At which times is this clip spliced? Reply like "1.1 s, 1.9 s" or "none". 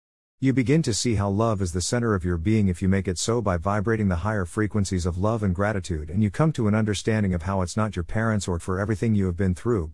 8.6 s